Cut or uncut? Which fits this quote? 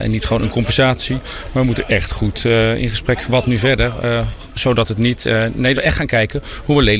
cut